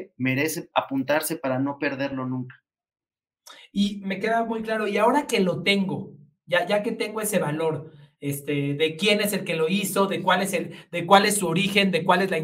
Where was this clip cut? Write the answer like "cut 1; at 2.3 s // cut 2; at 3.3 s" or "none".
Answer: none